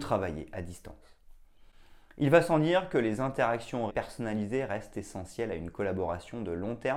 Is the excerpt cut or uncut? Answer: cut